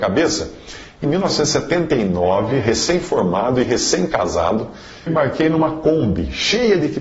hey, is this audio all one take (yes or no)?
no